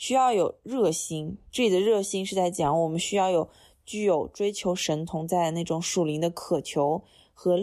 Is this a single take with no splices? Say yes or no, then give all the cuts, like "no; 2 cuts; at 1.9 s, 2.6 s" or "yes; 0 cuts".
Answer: yes; 0 cuts